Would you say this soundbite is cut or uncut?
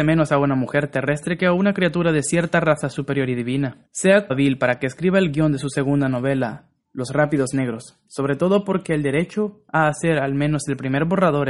cut